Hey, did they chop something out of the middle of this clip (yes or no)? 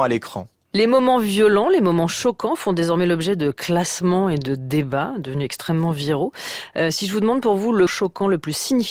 yes